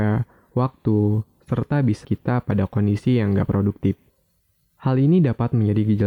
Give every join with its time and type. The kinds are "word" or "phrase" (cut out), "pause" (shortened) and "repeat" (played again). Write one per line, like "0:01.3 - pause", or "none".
0:02.0 - word